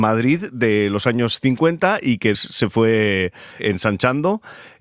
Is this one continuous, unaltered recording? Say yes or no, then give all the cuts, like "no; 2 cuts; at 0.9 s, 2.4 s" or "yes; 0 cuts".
no; 2 cuts; at 2.3 s, 3.6 s